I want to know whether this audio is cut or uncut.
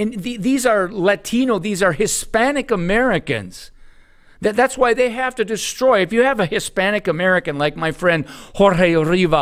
uncut